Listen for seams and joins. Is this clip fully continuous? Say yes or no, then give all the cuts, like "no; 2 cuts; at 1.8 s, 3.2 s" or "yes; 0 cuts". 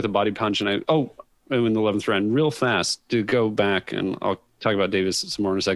yes; 0 cuts